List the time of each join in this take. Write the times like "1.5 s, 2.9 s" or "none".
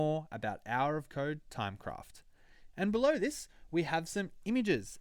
none